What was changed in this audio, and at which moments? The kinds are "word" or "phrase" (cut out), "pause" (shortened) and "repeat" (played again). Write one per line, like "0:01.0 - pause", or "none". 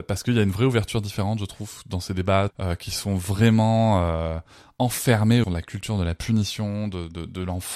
0:02.5 - phrase
0:05.4 - word